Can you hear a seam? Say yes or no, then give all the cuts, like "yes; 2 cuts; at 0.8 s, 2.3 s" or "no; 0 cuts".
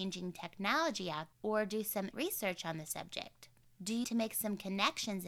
yes; 3 cuts; at 1.3 s, 2.1 s, 4.0 s